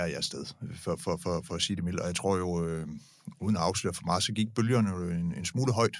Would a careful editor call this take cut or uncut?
uncut